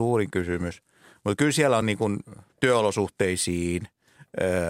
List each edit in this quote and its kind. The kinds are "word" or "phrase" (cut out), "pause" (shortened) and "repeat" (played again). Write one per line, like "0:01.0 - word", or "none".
none